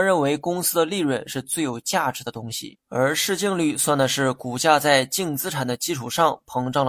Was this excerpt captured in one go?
no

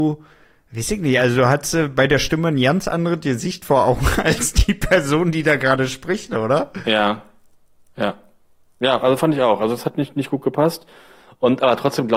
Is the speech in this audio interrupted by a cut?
no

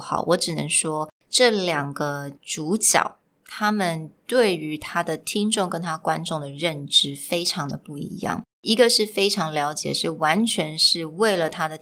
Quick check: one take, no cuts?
no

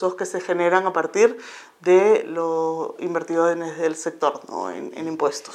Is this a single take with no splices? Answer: yes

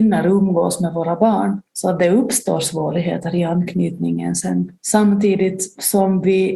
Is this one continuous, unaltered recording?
no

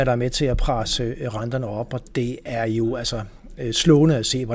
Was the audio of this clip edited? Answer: no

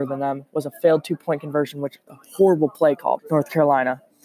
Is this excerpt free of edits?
no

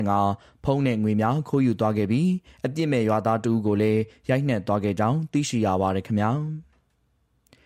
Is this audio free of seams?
yes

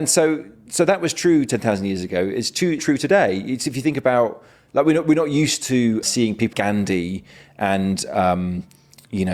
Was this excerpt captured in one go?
no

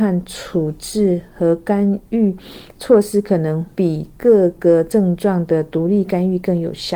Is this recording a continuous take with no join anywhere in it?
no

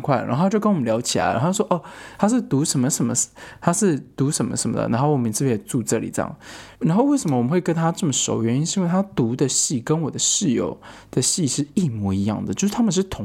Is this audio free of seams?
no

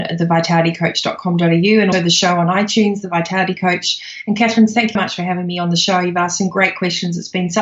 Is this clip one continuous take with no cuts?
no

